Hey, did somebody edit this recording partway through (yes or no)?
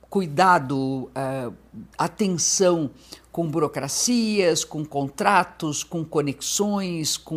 yes